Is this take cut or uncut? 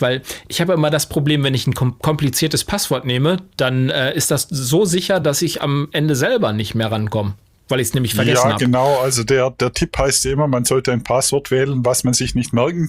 uncut